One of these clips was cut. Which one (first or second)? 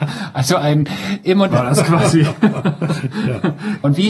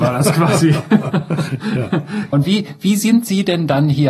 first